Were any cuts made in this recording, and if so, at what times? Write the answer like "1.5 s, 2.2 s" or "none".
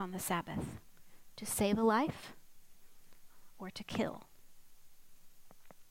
none